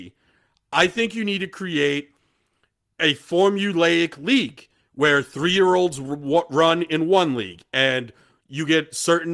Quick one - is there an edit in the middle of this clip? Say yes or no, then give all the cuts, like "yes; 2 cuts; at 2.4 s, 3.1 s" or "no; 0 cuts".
no; 0 cuts